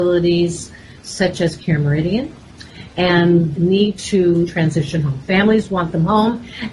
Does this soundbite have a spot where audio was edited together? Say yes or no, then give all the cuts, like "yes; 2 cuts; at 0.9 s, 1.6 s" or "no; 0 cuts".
yes; 2 cuts; at 3.5 s, 4.5 s